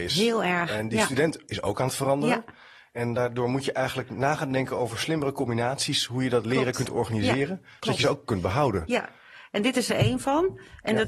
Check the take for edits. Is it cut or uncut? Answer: uncut